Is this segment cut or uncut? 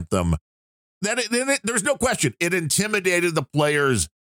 uncut